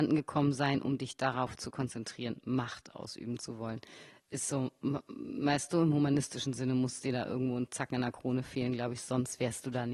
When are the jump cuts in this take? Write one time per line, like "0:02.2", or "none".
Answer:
none